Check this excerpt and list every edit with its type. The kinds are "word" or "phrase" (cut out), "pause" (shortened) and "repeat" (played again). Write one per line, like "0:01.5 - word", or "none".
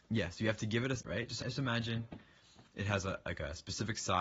0:01.0 - word
0:01.4 - word